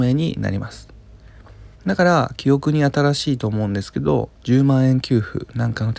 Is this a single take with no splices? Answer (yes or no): no